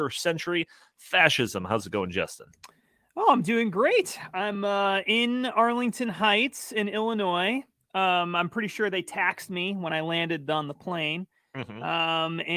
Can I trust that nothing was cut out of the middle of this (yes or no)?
yes